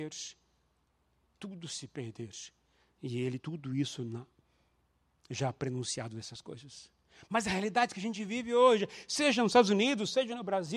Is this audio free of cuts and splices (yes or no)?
no